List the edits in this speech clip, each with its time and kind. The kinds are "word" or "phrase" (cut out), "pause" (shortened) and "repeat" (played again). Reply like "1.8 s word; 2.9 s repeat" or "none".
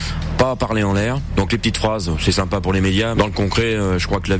3.1 s word